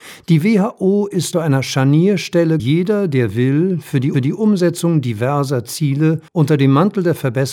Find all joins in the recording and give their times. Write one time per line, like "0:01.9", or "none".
0:01.3
0:02.6
0:04.1
0:06.3